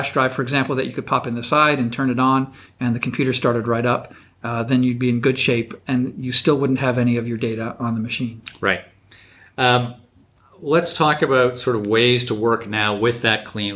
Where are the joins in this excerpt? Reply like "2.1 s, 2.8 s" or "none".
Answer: none